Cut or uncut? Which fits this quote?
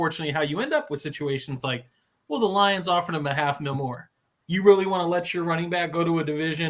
uncut